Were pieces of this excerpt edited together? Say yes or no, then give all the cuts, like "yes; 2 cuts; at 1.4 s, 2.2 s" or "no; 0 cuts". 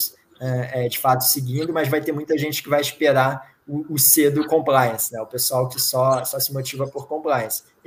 no; 0 cuts